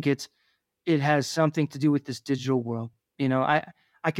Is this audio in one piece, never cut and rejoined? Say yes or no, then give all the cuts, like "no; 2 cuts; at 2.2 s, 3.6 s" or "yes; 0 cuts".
yes; 0 cuts